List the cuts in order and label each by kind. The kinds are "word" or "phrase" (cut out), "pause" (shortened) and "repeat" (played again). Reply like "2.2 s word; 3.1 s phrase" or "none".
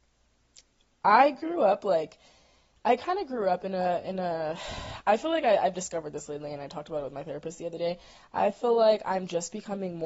none